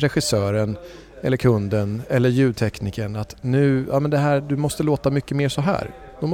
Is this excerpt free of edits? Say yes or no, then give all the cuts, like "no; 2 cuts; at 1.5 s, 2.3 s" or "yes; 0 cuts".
yes; 0 cuts